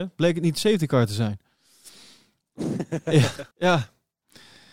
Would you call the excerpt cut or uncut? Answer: cut